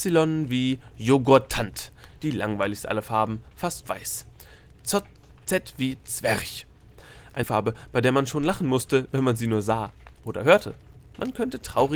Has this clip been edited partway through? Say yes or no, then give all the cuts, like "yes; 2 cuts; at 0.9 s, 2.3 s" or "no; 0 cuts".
yes; 2 cuts; at 3.8 s, 7.4 s